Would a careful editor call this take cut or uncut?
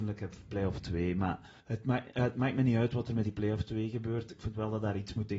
cut